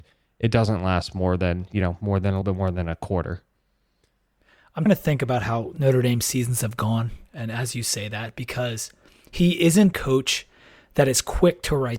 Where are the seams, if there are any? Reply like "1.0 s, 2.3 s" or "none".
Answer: 2.4 s, 4.9 s, 9.9 s